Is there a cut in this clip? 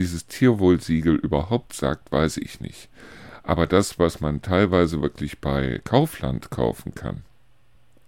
no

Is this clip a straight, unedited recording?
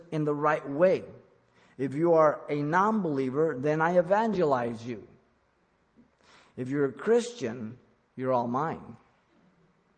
yes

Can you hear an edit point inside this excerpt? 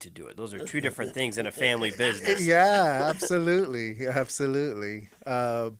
no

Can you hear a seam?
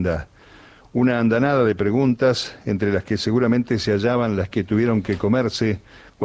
no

